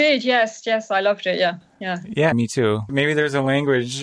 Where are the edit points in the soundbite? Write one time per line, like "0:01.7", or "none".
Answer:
0:02.3

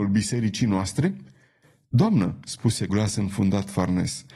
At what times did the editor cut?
0:02.9

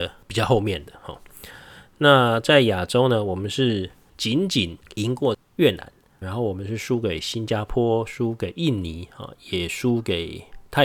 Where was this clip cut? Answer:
0:06.2

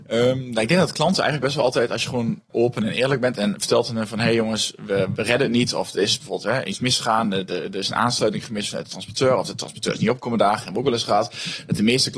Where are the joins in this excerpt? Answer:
0:02.5

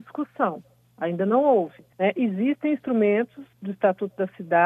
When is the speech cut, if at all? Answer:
0:01.9
0:03.5

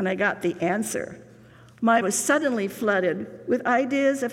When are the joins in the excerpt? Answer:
0:02.0

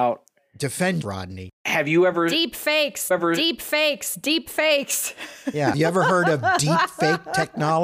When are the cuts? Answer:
0:01.0
0:03.1
0:05.7

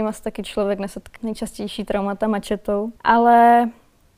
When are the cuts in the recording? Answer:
0:01.2
0:03.0

